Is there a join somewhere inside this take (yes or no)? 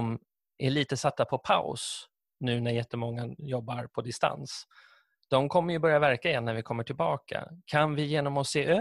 no